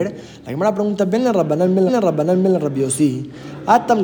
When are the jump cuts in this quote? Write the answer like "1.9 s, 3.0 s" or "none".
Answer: 1.9 s